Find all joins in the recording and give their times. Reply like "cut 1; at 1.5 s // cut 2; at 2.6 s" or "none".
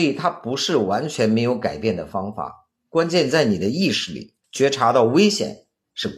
cut 1; at 4.4 s